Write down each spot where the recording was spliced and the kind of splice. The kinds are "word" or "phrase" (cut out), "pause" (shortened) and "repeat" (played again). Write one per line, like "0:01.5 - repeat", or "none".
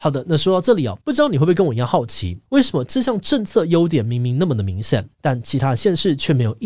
0:01.0 - pause
0:02.5 - pause
0:05.1 - pause